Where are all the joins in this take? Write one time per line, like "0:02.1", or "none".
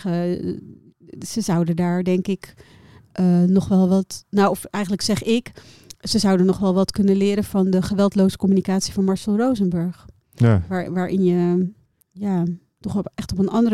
none